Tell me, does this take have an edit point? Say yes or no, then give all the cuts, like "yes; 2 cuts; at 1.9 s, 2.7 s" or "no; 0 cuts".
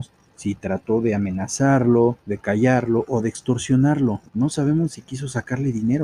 yes; 2 cuts; at 2.2 s, 4.3 s